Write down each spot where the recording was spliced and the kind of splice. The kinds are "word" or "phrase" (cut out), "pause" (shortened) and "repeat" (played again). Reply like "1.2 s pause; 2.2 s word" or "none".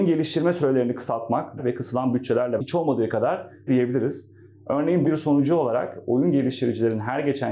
1.6 s phrase; 2.6 s word; 3.7 s word; 5.0 s word